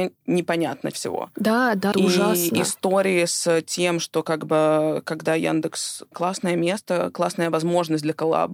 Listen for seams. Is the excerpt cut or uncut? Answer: cut